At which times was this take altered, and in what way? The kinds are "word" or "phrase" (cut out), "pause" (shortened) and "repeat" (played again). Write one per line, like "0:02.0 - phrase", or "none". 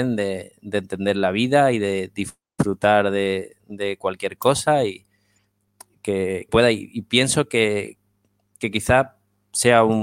0:06.5 - word